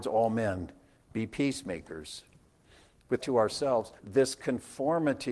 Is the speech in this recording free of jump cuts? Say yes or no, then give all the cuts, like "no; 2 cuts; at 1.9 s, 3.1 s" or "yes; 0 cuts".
no; 2 cuts; at 3.2 s, 4.0 s